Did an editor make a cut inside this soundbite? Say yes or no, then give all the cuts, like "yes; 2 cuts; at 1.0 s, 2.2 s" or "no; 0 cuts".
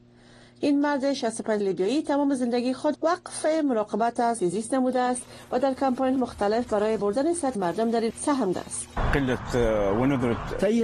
yes; 8 cuts; at 1.6 s, 2.9 s, 4.4 s, 6.2 s, 7.0 s, 7.5 s, 8.1 s, 8.5 s